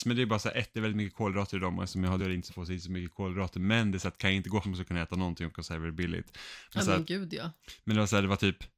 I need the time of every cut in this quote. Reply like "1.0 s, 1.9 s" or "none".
2.2 s, 2.5 s, 4.6 s, 6.8 s